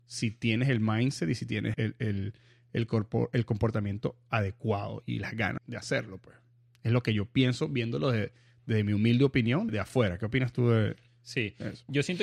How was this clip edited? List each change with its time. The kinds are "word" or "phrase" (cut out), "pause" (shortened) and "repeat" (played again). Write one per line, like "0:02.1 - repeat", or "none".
0:01.7 - word
0:05.6 - word
0:09.7 - word